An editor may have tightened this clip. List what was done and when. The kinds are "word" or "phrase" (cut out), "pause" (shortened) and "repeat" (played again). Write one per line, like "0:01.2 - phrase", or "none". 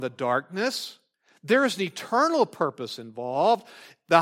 0:01.1 - pause